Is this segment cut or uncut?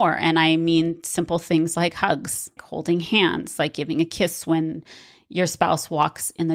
cut